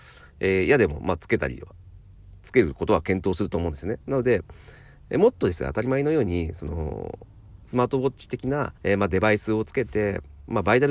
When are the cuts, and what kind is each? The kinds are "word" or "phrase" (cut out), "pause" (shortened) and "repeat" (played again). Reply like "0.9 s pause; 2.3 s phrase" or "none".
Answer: 8.8 s pause

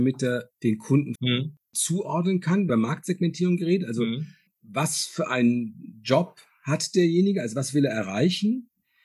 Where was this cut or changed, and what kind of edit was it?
1.1 s word; 2.7 s phrase; 4.5 s pause

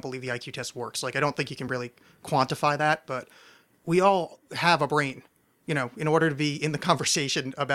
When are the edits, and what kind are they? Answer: none

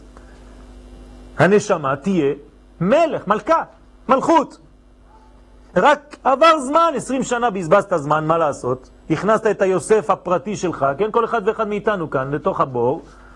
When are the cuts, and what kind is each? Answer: none

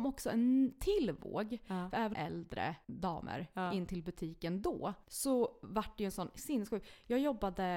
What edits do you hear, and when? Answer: 2.1 s phrase; 2.8 s word; 5.0 s pause

